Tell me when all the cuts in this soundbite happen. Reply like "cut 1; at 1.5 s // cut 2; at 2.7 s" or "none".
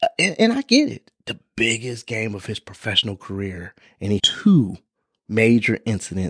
cut 1; at 4.2 s